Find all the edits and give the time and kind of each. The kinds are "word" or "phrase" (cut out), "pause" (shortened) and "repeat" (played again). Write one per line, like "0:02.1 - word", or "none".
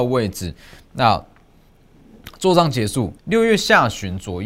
0:03.2 - pause